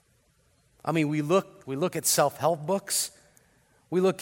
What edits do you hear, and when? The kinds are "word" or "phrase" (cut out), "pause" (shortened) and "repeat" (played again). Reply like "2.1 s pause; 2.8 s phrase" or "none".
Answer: 1.6 s phrase